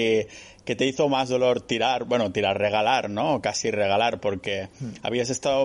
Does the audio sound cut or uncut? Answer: uncut